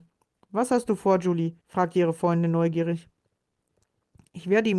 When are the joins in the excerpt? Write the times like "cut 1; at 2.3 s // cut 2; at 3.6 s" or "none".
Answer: cut 1; at 1.6 s